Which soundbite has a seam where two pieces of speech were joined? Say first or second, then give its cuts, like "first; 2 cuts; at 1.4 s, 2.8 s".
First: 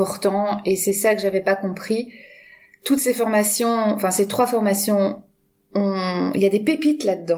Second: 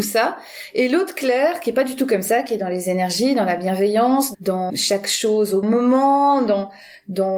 second; 3 cuts; at 4.3 s, 4.7 s, 5.6 s